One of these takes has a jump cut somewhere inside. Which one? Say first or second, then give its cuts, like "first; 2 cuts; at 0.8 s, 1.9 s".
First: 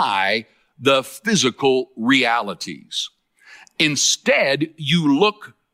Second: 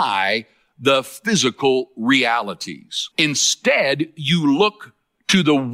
second; 1 cut; at 3.1 s